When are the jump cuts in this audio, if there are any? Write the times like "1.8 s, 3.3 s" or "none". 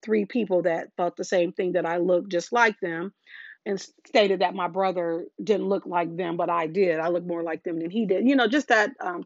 3.6 s, 5.3 s